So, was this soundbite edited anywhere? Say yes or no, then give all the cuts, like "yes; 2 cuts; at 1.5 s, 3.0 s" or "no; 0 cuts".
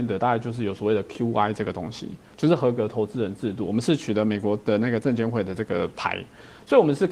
no; 0 cuts